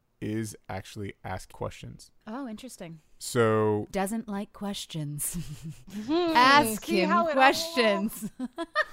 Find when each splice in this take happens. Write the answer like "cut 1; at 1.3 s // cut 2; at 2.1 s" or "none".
cut 1; at 1.5 s // cut 2; at 2.2 s // cut 3; at 3.9 s